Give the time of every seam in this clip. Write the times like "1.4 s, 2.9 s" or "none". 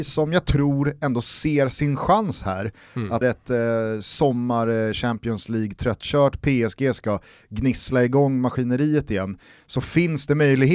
3.2 s